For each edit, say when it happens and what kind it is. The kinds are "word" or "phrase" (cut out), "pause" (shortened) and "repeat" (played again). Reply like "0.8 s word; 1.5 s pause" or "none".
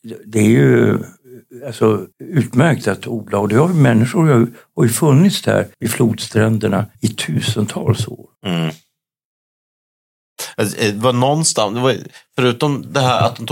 2.1 s pause; 5.7 s pause; 6.9 s pause; 8.3 s pause